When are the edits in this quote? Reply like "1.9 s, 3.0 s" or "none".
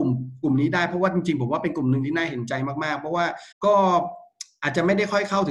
3.5 s

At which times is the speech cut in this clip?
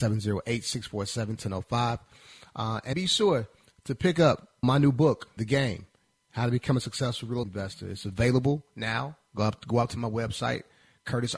2.9 s, 4.6 s, 5.4 s, 7.4 s

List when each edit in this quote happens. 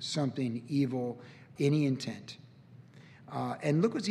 1.6 s

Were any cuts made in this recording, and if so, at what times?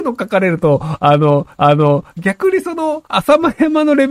1.6 s, 3.1 s

